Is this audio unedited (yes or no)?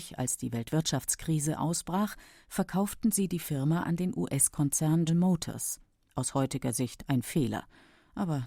no